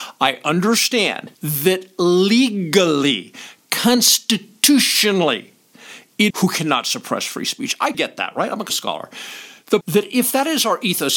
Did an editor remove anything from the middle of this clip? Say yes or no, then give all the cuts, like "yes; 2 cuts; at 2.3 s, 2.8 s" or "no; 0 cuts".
yes; 5 cuts; at 1.3 s, 6.3 s, 7.9 s, 8.7 s, 9.8 s